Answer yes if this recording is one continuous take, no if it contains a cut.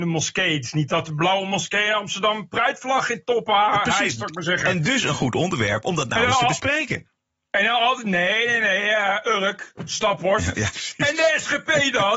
yes